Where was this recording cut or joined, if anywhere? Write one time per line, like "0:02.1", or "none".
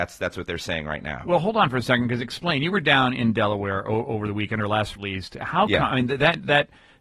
0:05.0